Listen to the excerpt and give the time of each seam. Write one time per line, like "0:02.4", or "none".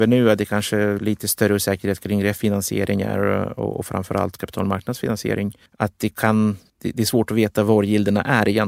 0:05.7
0:06.7